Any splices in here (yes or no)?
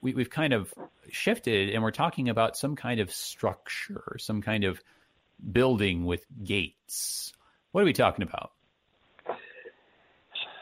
no